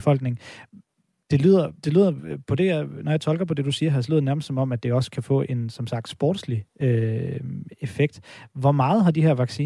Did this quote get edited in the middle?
yes; 2 cuts; at 1.8 s, 6.7 s

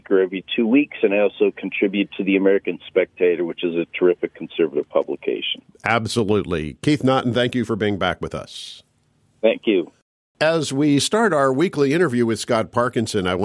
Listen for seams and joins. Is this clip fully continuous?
yes; 0 cuts

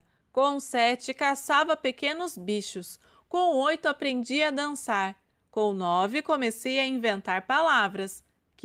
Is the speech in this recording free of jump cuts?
yes; 0 cuts

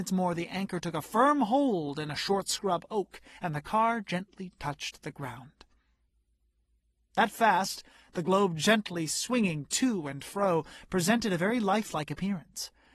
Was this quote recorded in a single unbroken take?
yes; 0 cuts

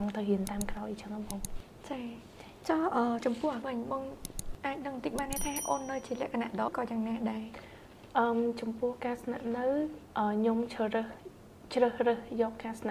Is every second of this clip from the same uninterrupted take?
no; 2 cuts; at 3.6 s, 6.7 s

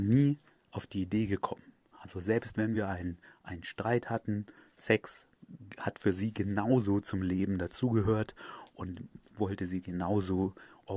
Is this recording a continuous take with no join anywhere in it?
yes; 0 cuts

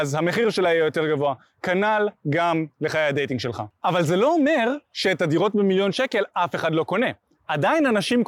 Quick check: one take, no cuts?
yes; 0 cuts

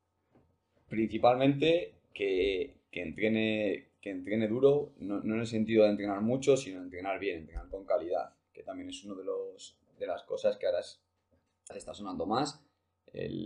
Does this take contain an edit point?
yes; 1 cut; at 11.7 s

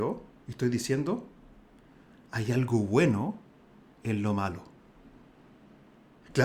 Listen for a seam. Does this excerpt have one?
no; 0 cuts

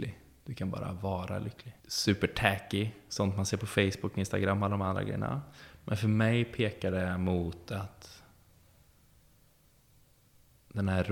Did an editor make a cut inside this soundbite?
yes; 1 cut; at 1.8 s

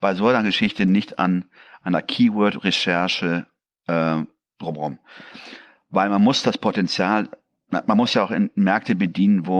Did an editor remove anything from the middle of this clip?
no; 0 cuts

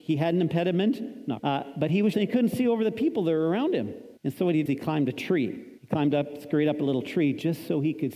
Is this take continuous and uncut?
no; 5 cuts; at 1.4 s, 2.1 s, 4.2 s, 4.7 s, 5.8 s

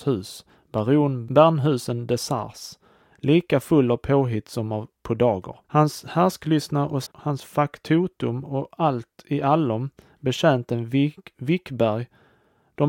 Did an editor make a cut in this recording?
yes; 3 cuts; at 4.9 s, 5.6 s, 7.1 s

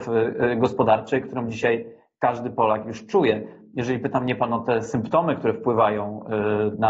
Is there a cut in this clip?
no; 0 cuts

